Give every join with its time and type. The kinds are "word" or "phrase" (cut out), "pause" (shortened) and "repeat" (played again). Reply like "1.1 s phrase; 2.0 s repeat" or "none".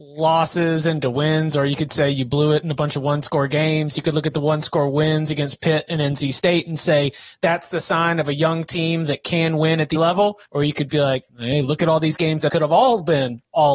10.0 s word; 10.5 s pause; 11.3 s pause; 12.5 s word